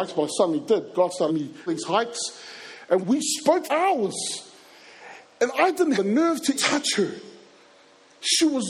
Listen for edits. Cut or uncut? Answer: cut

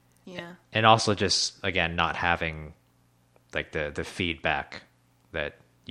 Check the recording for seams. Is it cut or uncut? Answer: uncut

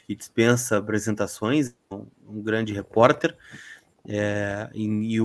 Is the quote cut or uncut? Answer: uncut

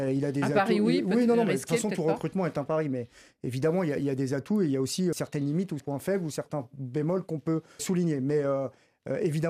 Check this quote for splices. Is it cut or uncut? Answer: cut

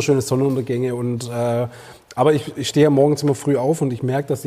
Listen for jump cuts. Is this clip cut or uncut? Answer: uncut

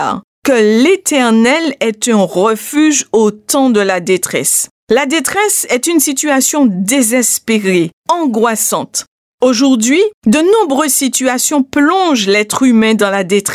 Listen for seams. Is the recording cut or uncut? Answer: cut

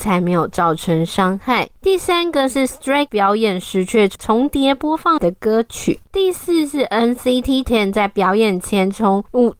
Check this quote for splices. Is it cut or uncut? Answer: cut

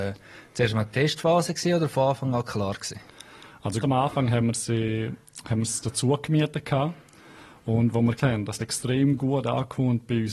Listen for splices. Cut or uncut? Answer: cut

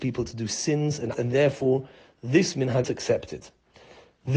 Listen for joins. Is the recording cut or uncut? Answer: cut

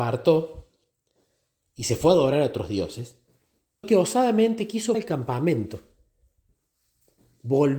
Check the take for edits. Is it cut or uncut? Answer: cut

